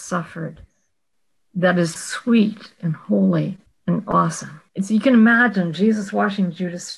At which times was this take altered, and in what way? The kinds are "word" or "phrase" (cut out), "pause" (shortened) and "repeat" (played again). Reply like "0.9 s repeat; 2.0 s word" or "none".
2.0 s word; 3.7 s pause; 4.7 s pause